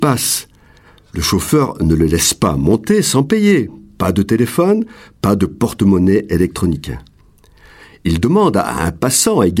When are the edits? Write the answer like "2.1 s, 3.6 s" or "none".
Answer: none